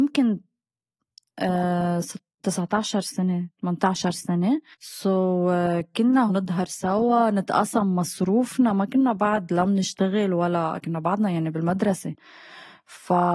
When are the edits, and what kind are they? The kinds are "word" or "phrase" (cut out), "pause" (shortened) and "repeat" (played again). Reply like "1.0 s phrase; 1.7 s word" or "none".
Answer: 4.7 s pause; 6.3 s phrase

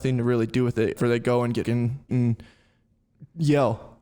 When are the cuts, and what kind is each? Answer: 1.0 s word; 1.6 s word; 2.1 s word

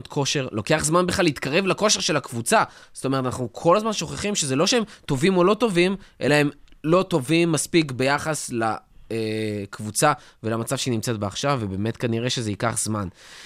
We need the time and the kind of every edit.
none

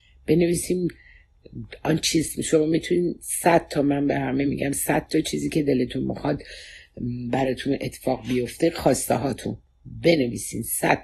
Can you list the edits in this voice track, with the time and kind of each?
none

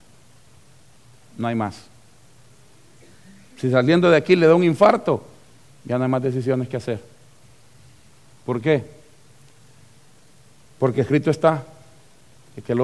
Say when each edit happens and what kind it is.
none

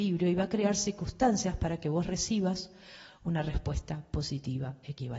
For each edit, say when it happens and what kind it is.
none

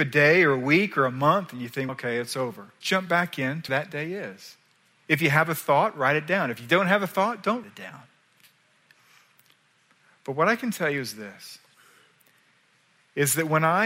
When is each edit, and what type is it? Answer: 1.9 s word; 2.8 s word; 3.7 s word; 7.6 s word

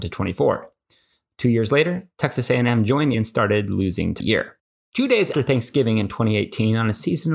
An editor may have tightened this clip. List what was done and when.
3.1 s phrase; 4.2 s phrase; 4.8 s pause; 5.3 s word

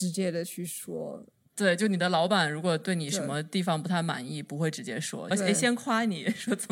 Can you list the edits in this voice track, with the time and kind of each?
5.3 s phrase

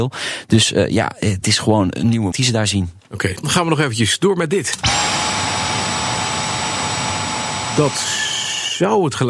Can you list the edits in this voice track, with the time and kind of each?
1.4 s word; 2.3 s word; 3.4 s word

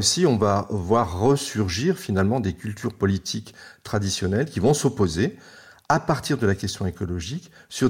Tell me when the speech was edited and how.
none

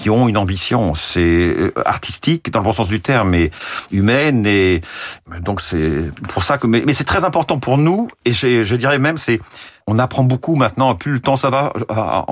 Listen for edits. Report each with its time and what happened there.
none

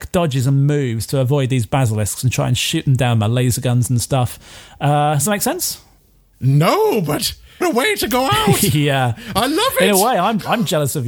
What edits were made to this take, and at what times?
7.6 s word

